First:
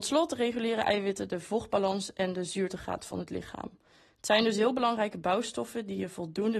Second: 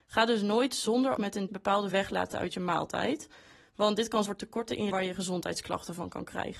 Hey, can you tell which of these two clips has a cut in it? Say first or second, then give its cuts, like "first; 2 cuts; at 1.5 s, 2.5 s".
second; 5 cuts; at 1.2 s, 1.5 s, 1.9 s, 4.3 s, 4.9 s